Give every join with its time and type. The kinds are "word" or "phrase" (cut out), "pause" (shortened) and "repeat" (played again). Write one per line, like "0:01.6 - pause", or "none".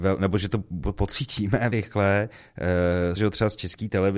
0:01.7 - word
0:03.2 - word